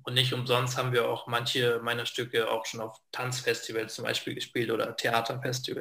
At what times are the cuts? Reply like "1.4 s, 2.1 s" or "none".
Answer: none